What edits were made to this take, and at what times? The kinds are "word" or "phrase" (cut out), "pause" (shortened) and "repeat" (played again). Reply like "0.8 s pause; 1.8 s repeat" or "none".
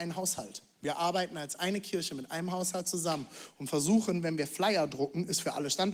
none

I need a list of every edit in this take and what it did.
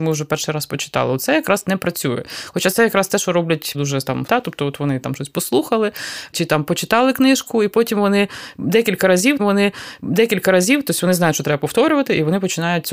3.7 s word; 4.3 s word; 9.4 s repeat

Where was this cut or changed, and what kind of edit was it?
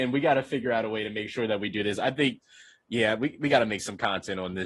none

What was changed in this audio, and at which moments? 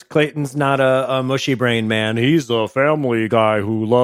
none

